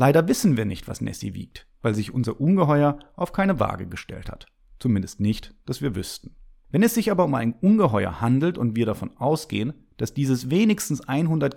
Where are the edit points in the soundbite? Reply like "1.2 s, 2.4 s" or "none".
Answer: none